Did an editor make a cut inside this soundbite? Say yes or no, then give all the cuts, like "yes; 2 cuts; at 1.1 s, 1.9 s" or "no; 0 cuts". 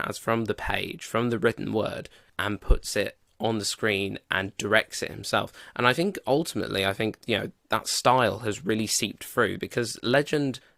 no; 0 cuts